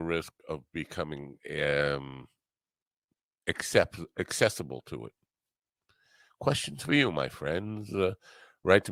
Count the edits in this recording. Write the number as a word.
zero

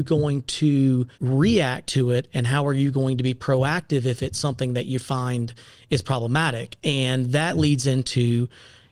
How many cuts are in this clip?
one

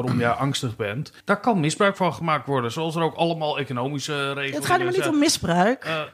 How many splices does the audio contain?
one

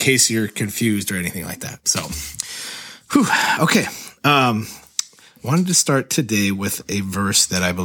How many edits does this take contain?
zero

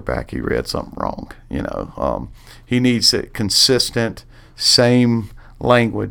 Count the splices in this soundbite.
zero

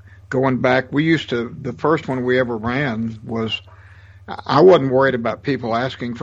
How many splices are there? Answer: zero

